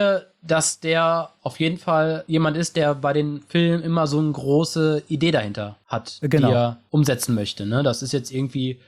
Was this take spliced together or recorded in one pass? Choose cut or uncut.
uncut